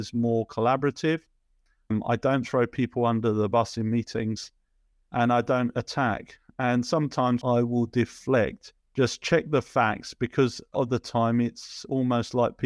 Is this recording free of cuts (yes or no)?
no